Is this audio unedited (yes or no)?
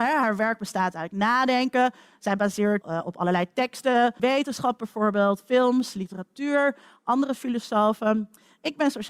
no